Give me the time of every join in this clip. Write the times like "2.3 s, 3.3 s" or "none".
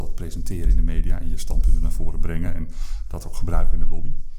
none